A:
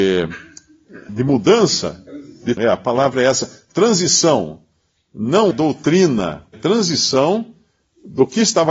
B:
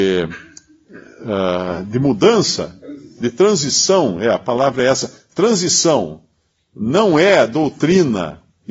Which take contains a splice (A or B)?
A